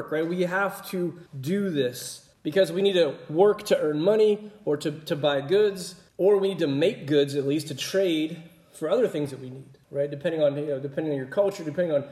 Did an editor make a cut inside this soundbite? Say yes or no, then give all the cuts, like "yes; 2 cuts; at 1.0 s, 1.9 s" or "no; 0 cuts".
yes; 4 cuts; at 1.3 s, 2.3 s, 6.1 s, 9.8 s